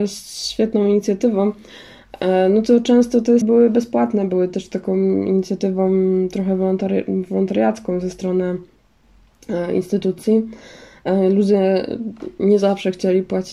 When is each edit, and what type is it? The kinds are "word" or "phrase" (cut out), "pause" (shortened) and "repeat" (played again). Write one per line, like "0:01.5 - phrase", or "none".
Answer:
0:03.4 - word